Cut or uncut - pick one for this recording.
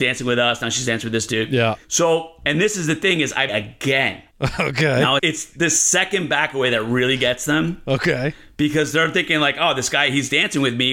cut